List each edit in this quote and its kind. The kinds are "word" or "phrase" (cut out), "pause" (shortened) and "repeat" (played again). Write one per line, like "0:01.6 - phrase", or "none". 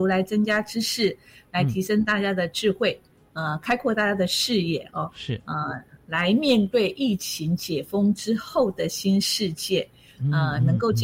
none